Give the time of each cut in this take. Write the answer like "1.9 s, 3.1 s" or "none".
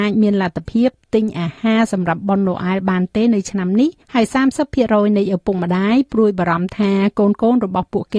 4.0 s